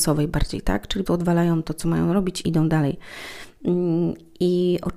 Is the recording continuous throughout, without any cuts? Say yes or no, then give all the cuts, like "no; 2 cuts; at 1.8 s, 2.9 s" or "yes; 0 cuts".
no; 2 cuts; at 1.0 s, 2.4 s